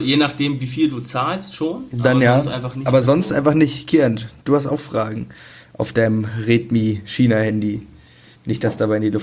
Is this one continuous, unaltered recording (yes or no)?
yes